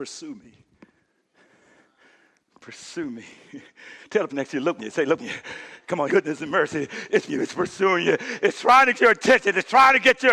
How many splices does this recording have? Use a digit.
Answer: 6